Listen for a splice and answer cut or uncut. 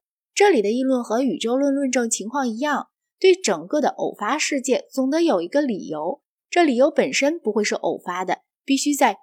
uncut